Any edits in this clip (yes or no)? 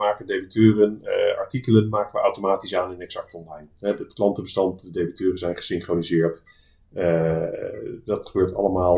no